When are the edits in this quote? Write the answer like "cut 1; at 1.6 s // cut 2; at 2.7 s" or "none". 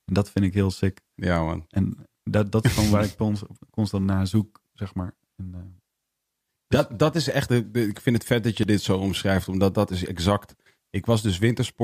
none